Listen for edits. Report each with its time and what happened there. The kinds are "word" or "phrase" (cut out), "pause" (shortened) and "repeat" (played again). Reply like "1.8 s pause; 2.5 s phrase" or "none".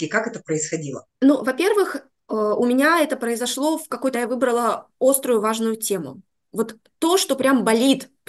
1.1 s pause; 4.1 s phrase

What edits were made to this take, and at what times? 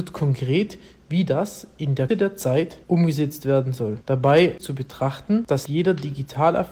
2.1 s word; 2.8 s pause; 4.6 s phrase; 5.7 s word

